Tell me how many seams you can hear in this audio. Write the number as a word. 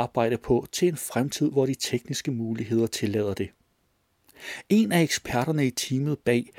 zero